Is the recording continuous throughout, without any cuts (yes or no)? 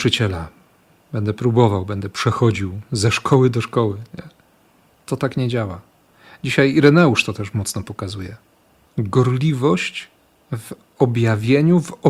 yes